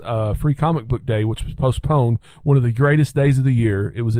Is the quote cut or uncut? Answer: uncut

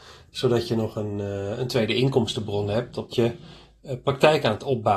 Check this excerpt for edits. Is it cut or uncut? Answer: cut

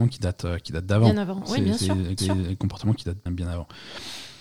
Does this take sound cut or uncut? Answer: cut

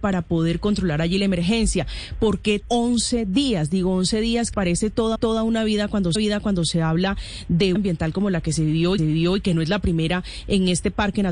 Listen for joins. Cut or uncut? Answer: cut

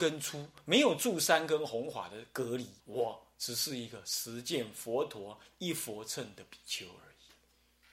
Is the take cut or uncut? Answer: cut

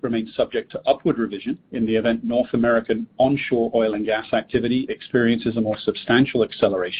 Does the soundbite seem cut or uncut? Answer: uncut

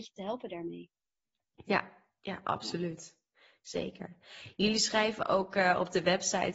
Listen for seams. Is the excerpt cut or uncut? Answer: uncut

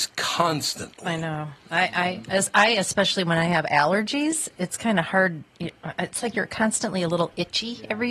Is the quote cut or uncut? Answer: uncut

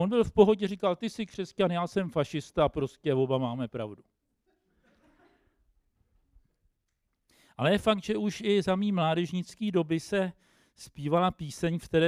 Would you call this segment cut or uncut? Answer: uncut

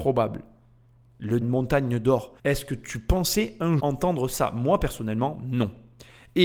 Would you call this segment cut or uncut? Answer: cut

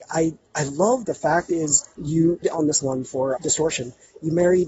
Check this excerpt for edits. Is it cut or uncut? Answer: cut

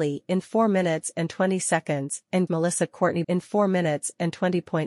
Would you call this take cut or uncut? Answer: cut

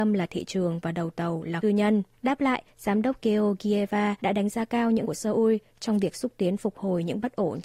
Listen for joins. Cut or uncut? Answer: cut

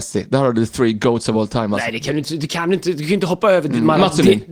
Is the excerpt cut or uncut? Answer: uncut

